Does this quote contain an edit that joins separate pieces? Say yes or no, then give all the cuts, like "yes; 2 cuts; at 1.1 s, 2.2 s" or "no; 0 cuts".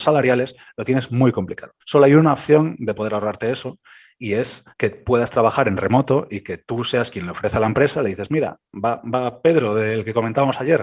yes; 2 cuts; at 1.8 s, 4.7 s